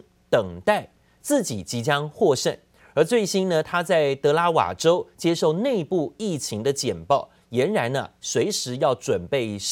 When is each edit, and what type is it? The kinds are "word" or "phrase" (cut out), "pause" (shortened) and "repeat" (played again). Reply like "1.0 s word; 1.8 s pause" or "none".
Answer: none